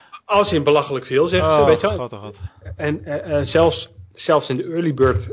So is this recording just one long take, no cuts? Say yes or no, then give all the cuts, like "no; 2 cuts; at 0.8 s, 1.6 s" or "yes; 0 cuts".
yes; 0 cuts